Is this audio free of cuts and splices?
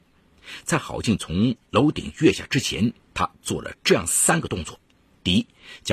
no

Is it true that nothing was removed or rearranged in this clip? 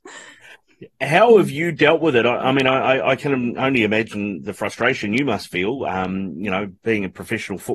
yes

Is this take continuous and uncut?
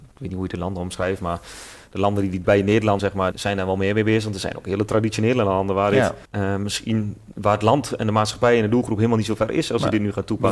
no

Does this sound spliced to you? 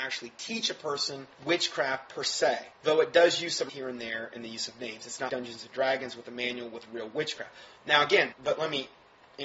yes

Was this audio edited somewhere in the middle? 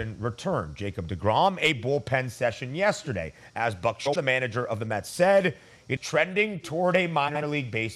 yes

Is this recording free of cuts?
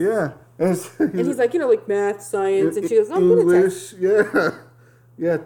yes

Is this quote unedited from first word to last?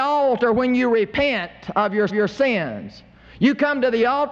no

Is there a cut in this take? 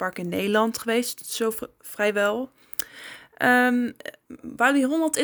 no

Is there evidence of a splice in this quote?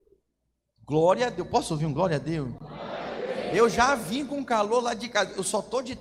no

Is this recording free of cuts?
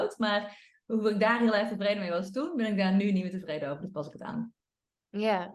yes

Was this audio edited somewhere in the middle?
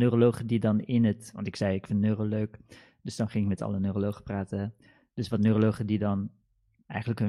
no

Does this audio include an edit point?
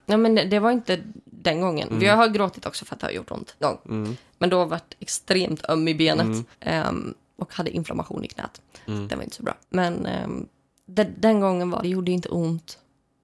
yes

